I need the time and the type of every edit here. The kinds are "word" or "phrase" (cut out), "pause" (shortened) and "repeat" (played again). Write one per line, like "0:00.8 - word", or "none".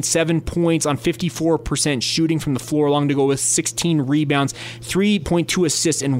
none